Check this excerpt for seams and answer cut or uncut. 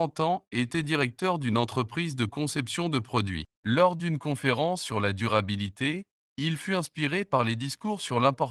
cut